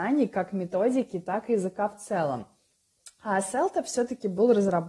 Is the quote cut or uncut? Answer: uncut